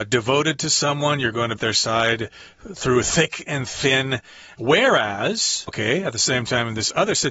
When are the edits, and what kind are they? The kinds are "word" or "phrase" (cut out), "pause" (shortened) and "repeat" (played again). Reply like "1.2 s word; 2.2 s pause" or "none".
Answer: 1.6 s phrase; 5.7 s word

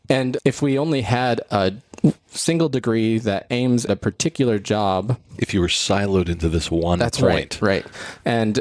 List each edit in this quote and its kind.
3.9 s word

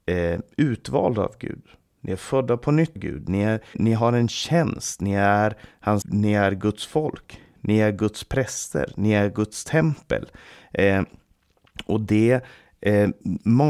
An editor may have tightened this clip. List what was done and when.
3.0 s word; 3.7 s word; 6.0 s word

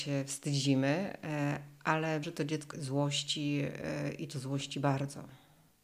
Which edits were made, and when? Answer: 2.2 s word; 2.7 s word

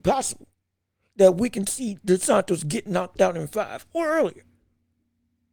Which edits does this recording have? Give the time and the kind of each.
none

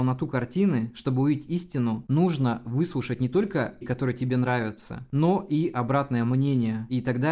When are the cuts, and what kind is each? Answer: 3.8 s word

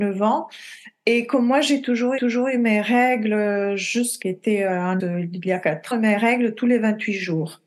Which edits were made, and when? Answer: 2.2 s repeat; 4.2 s phrase; 5.0 s word; 5.9 s phrase

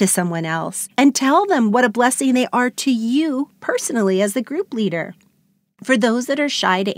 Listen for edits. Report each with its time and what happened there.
none

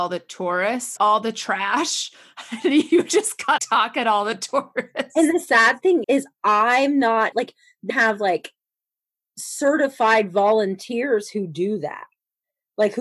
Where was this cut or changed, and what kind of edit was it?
1.0 s word; 3.6 s word; 6.0 s word; 7.3 s word; 7.9 s word

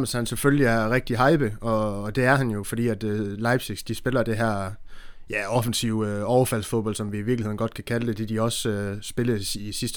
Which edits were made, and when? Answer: none

